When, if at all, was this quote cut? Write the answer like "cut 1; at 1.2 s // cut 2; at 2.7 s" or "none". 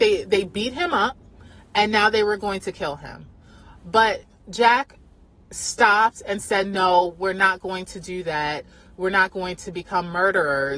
none